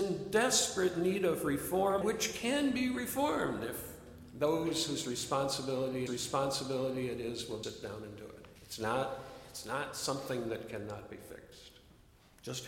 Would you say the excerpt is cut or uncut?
cut